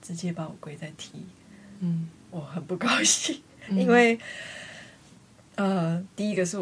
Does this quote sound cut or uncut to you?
uncut